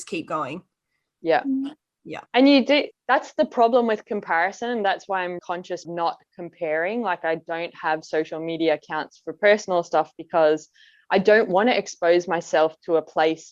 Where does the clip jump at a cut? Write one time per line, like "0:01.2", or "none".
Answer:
0:02.3
0:02.9
0:05.4
0:05.8